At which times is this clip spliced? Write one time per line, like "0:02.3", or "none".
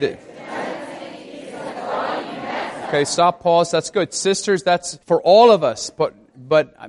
0:05.0